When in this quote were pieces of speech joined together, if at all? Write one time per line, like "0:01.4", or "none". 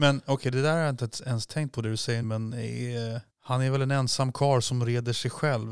0:02.2
0:03.3